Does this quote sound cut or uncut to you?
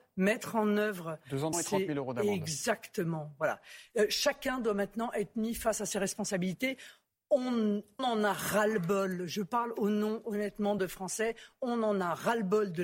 cut